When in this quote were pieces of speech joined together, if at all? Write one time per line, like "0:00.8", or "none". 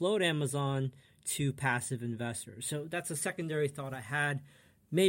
none